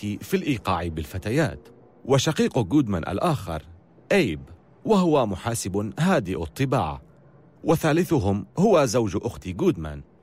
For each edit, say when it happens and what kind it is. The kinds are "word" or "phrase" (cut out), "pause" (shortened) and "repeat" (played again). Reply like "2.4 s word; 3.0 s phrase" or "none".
none